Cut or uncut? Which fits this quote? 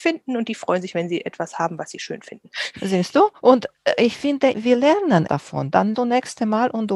cut